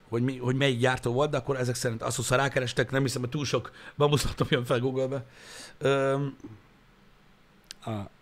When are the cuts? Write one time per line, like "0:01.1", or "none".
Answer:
none

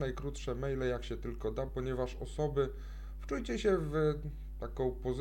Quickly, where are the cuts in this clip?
none

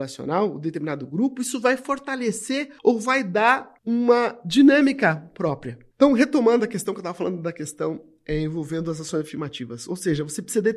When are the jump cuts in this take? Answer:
0:02.8
0:03.8
0:05.9

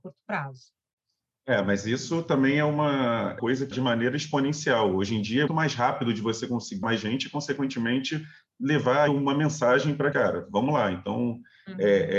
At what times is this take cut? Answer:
0:03.4
0:03.7
0:05.5
0:06.8
0:09.1
0:10.1

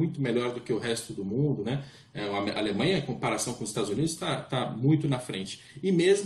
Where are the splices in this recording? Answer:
none

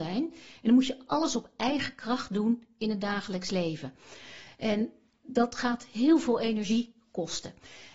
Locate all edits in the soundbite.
none

